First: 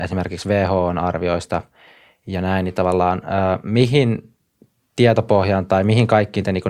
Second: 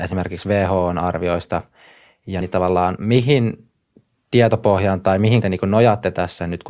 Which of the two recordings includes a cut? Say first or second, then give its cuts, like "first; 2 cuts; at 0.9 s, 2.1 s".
second; 3 cuts; at 2.4 s, 3.0 s, 5.4 s